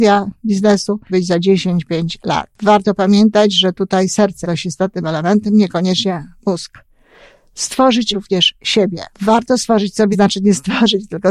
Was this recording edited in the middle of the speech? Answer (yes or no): yes